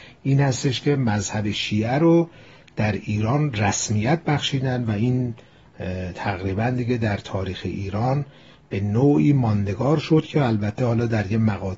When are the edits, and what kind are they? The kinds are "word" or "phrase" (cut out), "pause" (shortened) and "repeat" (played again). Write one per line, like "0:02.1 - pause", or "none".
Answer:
none